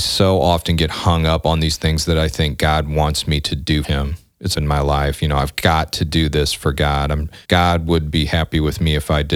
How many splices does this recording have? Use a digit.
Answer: 3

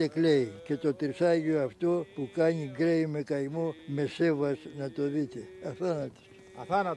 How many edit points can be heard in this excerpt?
1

